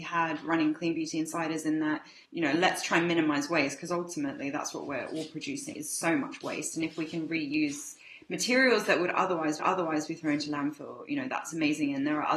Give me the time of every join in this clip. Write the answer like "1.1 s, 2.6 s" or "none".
2.3 s, 5.7 s, 9.6 s